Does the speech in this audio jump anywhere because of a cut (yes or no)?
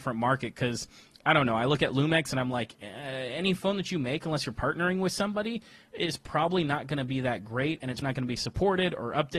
yes